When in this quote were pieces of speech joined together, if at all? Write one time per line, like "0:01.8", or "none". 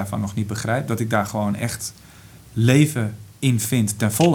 0:02.5